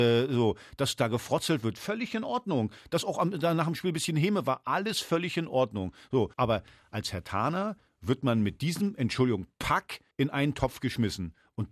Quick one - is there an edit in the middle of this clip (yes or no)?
yes